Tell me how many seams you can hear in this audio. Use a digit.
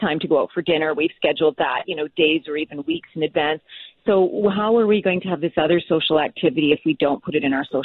0